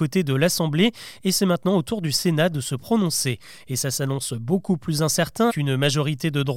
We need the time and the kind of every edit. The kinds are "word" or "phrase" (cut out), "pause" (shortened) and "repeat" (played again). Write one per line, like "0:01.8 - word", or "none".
0:05.5 - word